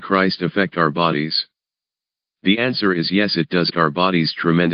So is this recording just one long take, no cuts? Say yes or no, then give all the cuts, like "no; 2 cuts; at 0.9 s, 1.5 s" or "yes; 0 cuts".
no; 1 cut; at 3.7 s